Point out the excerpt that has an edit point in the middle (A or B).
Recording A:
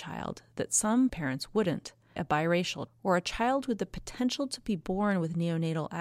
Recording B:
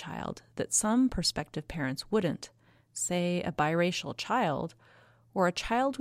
A